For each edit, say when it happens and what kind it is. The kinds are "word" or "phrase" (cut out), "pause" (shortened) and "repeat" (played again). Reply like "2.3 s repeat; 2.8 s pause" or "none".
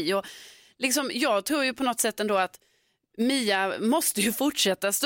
none